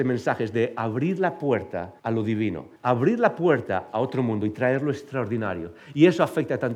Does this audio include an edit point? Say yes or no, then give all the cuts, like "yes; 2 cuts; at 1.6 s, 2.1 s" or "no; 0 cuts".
yes; 2 cuts; at 2.0 s, 2.8 s